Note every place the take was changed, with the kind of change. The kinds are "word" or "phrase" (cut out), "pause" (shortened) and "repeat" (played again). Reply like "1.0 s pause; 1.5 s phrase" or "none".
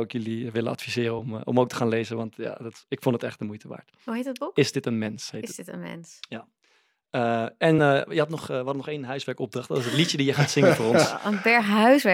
none